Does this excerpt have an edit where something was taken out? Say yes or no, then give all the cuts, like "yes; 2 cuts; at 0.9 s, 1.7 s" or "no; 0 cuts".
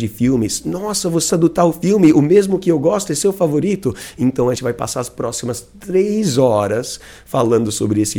yes; 2 cuts; at 1.3 s, 4.6 s